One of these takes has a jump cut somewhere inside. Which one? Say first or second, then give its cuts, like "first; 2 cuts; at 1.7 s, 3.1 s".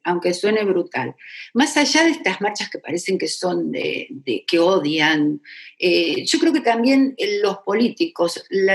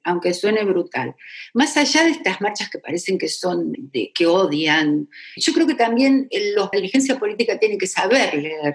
second; 3 cuts; at 3.7 s, 5.4 s, 6.7 s